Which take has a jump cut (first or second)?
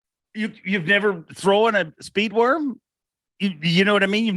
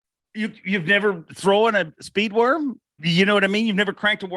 second